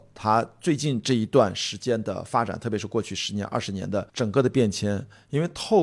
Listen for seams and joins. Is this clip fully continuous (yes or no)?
no